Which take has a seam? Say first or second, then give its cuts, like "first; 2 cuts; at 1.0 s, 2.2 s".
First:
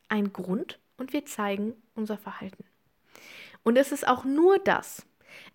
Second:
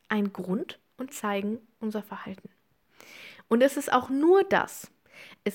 second; 1 cut; at 1.1 s